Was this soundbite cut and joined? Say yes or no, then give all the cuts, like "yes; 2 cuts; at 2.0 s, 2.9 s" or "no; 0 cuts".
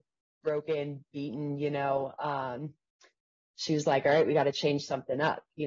no; 0 cuts